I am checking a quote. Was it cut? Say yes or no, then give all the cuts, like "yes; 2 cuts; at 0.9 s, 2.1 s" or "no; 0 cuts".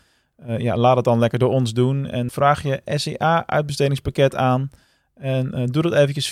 yes; 1 cut; at 2.3 s